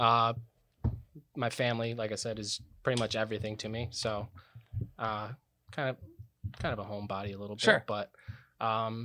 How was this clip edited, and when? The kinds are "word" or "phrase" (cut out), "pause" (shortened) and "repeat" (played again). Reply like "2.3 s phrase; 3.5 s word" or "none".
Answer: none